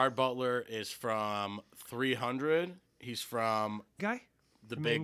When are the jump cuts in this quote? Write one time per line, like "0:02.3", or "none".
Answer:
0:04.0

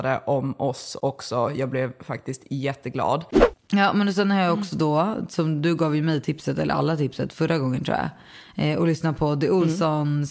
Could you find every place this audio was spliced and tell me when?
0:03.6

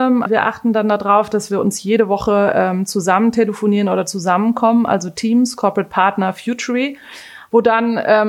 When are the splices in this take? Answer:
none

